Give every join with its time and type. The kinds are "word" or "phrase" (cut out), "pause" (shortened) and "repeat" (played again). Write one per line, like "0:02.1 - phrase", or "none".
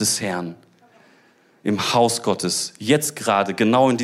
none